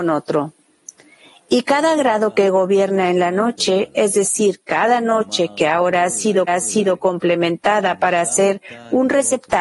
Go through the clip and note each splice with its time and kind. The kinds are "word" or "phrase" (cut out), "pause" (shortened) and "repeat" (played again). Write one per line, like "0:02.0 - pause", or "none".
0:06.5 - repeat